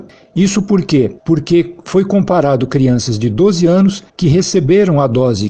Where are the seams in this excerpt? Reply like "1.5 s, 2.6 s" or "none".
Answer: 1.2 s, 4.1 s